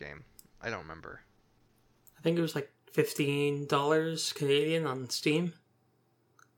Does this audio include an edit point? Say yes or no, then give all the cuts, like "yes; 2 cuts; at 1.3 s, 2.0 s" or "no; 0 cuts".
no; 0 cuts